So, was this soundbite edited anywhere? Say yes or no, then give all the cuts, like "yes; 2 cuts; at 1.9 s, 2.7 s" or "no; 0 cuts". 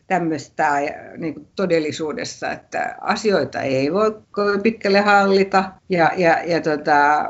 yes; 2 cuts; at 4.2 s, 5.8 s